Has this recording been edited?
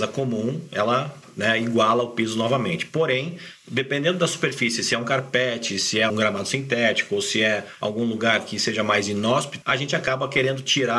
yes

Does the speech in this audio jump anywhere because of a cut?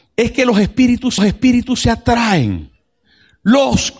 yes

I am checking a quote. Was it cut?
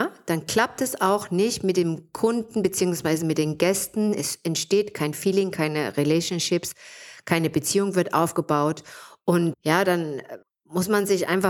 yes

